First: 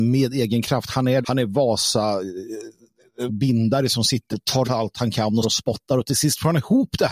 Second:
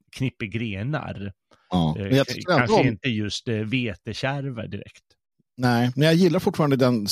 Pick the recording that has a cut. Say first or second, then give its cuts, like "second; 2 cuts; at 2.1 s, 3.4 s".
first; 5 cuts; at 1.2 s, 3.3 s, 4.3 s, 4.6 s, 5.4 s